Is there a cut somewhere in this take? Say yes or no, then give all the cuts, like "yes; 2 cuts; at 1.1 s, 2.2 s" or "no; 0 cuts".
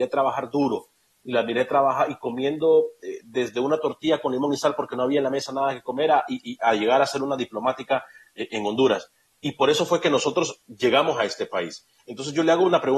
no; 0 cuts